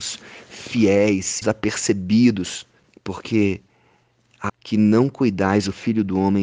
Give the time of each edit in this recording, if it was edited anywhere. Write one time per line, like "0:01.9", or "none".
0:01.4
0:02.8
0:04.5